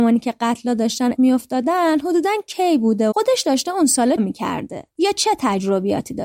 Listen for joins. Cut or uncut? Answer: cut